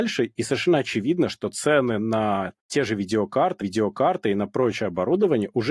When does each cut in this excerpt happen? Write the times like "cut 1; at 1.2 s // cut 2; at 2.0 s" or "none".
cut 1; at 3.6 s